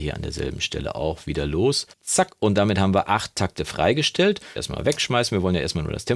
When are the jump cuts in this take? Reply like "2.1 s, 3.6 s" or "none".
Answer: 1.9 s, 4.6 s